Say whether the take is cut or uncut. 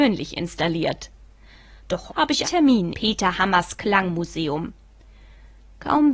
cut